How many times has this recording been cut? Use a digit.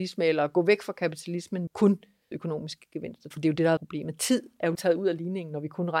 5